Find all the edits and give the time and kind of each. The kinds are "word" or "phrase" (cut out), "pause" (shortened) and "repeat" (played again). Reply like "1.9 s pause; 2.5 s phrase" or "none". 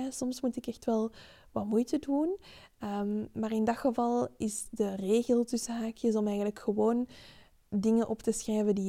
none